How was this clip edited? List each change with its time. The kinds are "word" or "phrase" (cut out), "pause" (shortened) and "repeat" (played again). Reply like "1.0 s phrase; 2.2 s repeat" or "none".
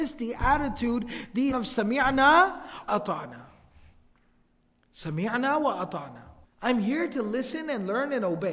1.5 s word; 2.9 s word; 6.4 s pause